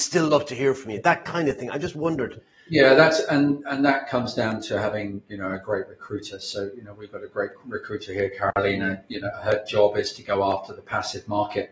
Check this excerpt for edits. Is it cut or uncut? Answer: uncut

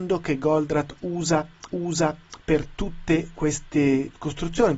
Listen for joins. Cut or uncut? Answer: cut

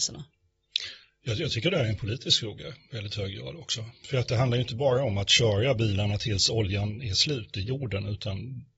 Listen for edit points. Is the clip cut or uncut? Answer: uncut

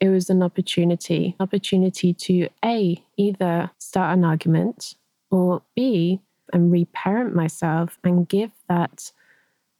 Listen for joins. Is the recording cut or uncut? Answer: cut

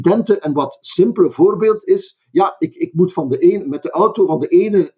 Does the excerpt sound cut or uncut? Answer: cut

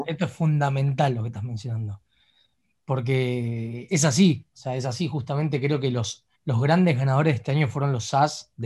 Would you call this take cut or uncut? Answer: cut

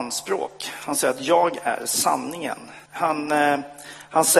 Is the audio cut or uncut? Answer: cut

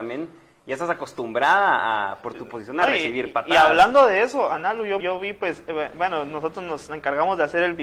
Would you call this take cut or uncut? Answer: cut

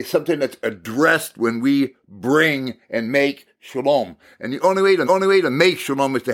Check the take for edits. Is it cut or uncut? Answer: cut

